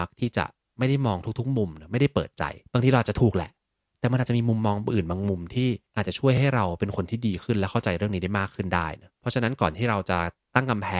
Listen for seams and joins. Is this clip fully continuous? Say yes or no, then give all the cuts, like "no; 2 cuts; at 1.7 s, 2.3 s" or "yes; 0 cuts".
no; 3 cuts; at 2.7 s, 5.9 s, 9.2 s